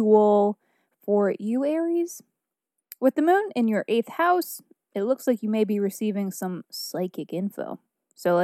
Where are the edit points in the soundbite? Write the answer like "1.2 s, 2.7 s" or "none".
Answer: none